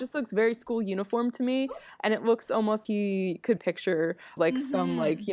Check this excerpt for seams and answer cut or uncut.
cut